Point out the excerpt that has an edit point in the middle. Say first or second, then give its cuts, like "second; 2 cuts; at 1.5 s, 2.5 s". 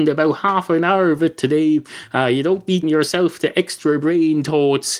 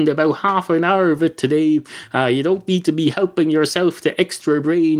first; 1 cut; at 2.8 s